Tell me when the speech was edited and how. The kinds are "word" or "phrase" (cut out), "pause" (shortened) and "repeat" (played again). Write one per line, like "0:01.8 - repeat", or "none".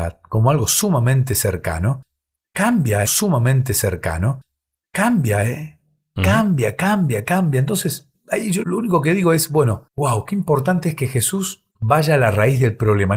0:03.0 - repeat
0:08.6 - word
0:09.9 - pause
0:11.7 - pause